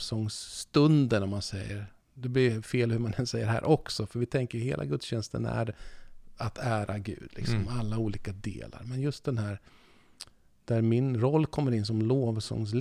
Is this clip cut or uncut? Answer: uncut